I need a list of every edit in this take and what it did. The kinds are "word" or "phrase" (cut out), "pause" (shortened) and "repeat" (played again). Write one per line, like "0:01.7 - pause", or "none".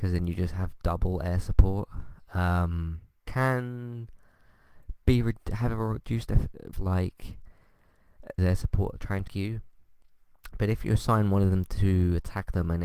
0:03.2 - word
0:06.7 - phrase
0:08.4 - word
0:09.3 - word

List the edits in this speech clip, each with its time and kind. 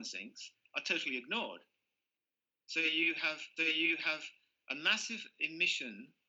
0:03.6 - repeat

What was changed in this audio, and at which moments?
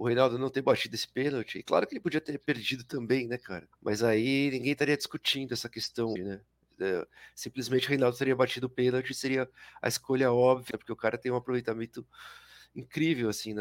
0:03.8 - pause
0:06.2 - word
0:10.7 - phrase

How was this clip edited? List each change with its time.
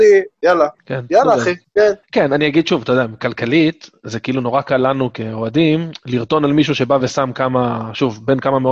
none

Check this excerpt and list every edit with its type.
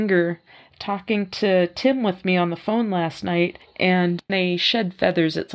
0:04.3 - word

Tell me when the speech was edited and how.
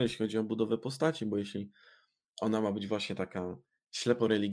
none

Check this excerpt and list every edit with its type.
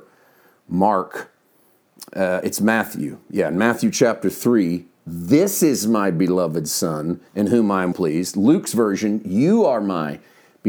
0:07.3 - pause
0:07.9 - word

